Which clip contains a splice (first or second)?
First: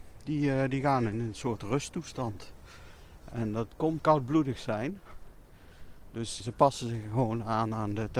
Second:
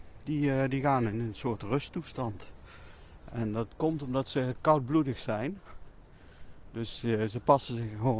first